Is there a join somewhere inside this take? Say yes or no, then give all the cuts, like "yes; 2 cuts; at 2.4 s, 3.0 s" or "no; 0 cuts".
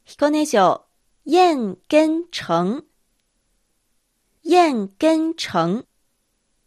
yes; 1 cut; at 1.0 s